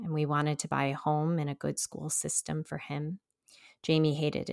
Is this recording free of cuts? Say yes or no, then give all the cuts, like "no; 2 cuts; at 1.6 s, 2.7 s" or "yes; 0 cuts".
yes; 0 cuts